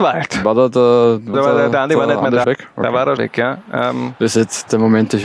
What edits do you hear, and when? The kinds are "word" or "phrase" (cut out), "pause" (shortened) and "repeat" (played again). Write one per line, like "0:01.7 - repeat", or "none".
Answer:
0:01.3 - word
0:02.4 - word
0:03.2 - word